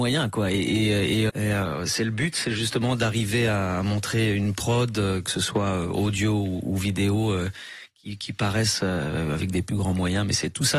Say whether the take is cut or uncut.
cut